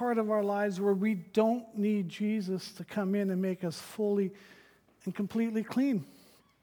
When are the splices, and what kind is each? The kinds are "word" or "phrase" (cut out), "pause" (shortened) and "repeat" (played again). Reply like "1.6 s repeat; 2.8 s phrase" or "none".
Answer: none